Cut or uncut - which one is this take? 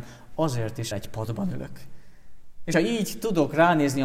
cut